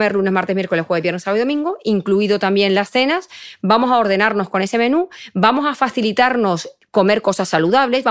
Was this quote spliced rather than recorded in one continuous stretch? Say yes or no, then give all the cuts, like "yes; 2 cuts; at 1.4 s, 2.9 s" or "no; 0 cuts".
no; 0 cuts